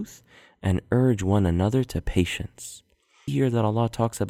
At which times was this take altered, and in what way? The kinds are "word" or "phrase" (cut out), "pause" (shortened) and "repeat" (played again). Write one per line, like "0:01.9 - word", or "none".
0:03.3 - phrase